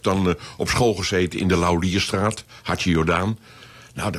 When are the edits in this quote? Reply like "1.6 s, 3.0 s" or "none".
none